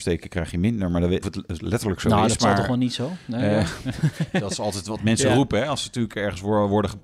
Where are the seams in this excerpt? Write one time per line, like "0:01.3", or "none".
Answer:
0:01.2